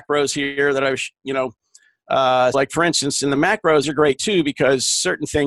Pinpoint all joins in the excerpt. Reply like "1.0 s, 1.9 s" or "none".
2.5 s, 3.8 s